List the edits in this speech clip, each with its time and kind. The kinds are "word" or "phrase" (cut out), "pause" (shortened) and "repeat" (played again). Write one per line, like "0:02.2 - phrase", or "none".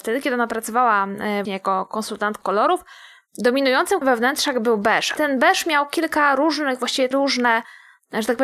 0:01.5 - word
0:02.4 - word
0:04.0 - word
0:05.2 - word
0:07.1 - word

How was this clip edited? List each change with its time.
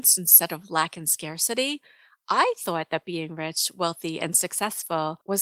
none

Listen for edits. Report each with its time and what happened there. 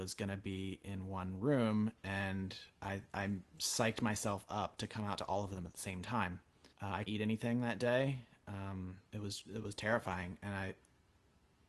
0:03.1 - pause
0:06.7 - pause
0:07.1 - word
0:09.1 - pause
0:09.5 - word

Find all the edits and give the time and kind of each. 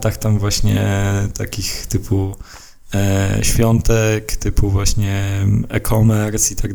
none

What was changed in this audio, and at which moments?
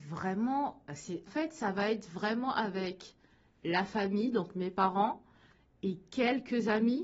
0:01.3 - word

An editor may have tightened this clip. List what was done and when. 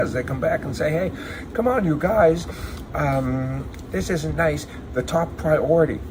none

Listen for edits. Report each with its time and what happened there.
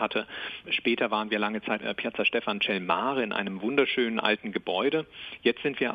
0:01.8 - word

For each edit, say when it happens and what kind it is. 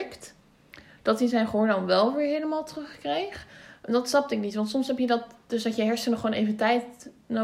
none

